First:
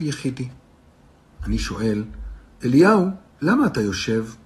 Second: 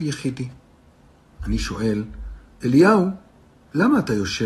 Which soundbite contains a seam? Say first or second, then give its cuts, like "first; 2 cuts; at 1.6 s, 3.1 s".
first; 1 cut; at 3.3 s